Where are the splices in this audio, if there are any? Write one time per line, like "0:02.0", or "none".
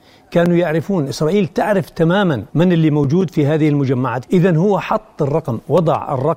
0:02.5
0:04.2